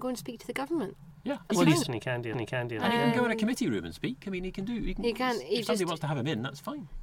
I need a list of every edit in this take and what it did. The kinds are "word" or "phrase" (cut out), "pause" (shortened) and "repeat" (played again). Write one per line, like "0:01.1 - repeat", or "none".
0:01.5 - word
0:01.8 - word
0:02.3 - repeat